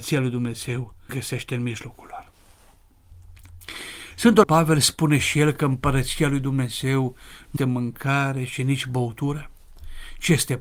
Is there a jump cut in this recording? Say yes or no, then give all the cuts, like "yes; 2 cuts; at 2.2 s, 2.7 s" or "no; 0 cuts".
yes; 3 cuts; at 1.1 s, 4.4 s, 7.6 s